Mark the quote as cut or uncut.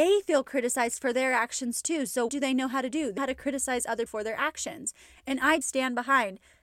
cut